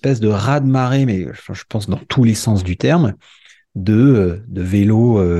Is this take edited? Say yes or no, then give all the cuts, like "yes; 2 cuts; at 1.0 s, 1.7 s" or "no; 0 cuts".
no; 0 cuts